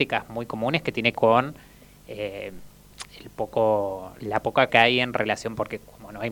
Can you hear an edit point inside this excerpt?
yes; 3 cuts; at 1.1 s, 4.2 s, 4.7 s

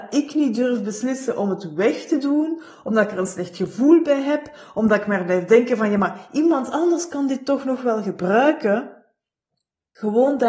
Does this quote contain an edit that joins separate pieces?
no; 0 cuts

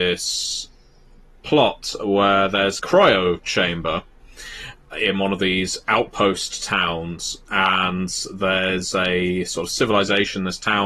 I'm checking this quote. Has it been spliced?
yes; 2 cuts; at 2.8 s, 4.9 s

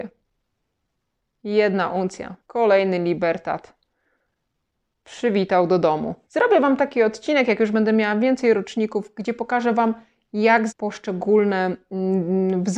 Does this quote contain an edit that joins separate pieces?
yes; 3 cuts; at 2.4 s, 6.2 s, 10.7 s

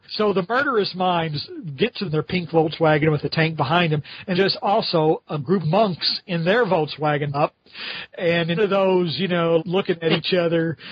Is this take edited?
yes; 6 cuts; at 2.0 s, 4.3 s, 5.6 s, 7.3 s, 8.6 s, 9.6 s

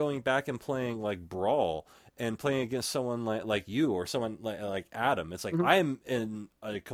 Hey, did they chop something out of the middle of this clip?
no; 0 cuts

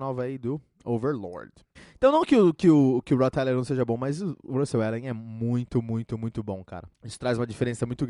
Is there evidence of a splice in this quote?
yes; 2 cuts; at 1.8 s, 6.9 s

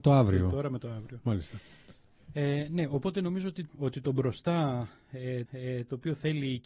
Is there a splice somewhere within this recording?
yes; 2 cuts; at 3.7 s, 5.5 s

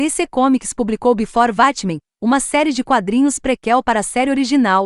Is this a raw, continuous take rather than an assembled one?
yes; 0 cuts

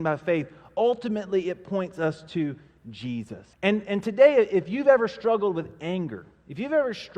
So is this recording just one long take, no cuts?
no; 1 cut; at 3.5 s

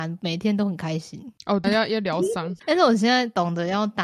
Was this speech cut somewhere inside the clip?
yes; 1 cut; at 1.6 s

